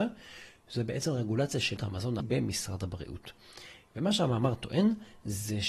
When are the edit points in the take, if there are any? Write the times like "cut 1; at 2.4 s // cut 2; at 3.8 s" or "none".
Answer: cut 1; at 1.8 s // cut 2; at 2.2 s

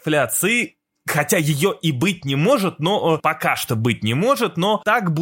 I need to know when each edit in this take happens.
none

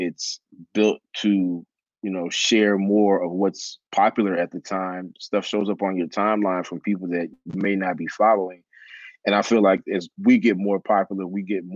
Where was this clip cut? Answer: cut 1; at 3.9 s

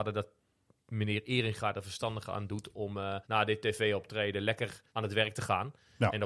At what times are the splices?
cut 1; at 3.2 s // cut 2; at 4.9 s

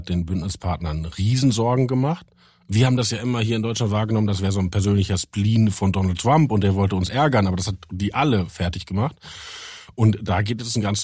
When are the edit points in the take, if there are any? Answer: none

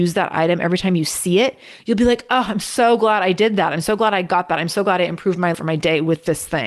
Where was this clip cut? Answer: cut 1; at 5.5 s

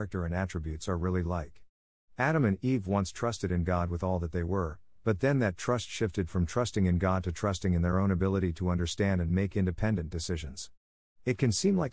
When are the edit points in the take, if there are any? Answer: none

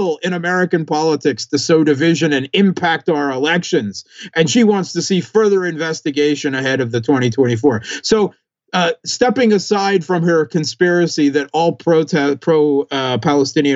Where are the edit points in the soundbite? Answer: none

